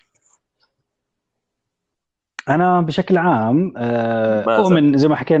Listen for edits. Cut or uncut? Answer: uncut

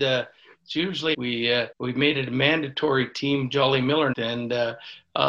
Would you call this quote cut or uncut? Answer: cut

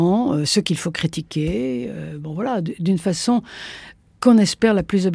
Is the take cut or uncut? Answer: uncut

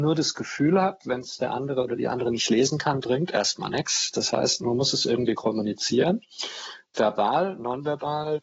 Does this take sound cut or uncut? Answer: uncut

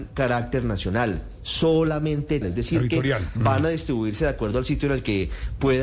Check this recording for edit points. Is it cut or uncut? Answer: cut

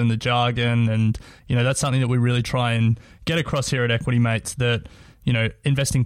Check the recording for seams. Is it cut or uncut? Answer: uncut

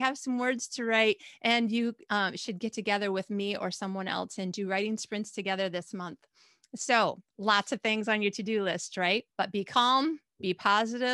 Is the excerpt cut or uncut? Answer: cut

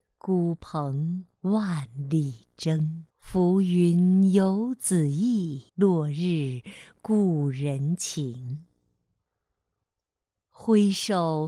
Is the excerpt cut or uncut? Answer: cut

